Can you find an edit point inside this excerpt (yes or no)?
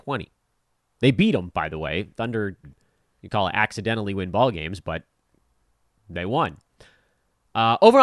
yes